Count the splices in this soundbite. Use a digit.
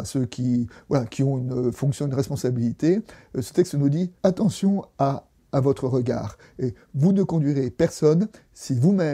1